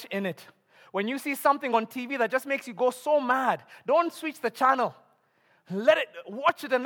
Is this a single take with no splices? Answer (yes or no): yes